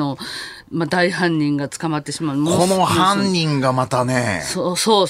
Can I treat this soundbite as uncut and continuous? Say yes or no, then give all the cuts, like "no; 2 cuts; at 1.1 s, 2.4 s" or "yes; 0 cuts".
yes; 0 cuts